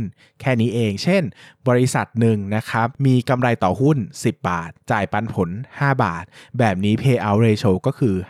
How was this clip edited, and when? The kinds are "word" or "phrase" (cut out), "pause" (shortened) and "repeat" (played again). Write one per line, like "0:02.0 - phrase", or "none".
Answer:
none